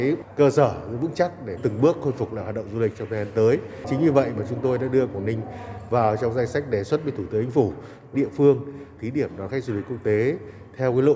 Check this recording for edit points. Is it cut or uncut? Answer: cut